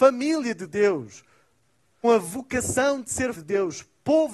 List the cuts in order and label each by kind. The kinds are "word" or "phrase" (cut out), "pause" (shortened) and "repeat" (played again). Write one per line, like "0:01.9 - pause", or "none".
0:02.0 - word
0:03.3 - word